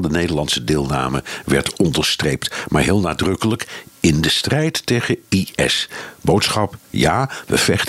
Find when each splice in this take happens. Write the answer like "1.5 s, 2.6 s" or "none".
none